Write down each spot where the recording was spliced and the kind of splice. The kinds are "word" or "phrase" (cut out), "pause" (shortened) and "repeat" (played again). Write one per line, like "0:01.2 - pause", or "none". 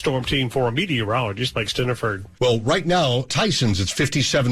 0:02.3 - pause
0:03.3 - word